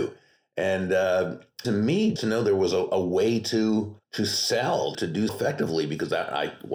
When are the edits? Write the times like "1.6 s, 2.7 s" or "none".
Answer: 1.6 s, 2.2 s, 4.0 s, 4.9 s, 5.3 s